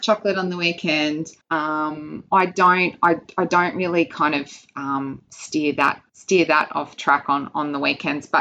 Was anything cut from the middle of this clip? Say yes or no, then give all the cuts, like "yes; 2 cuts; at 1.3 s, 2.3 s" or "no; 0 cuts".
yes; 2 cuts; at 1.4 s, 6.1 s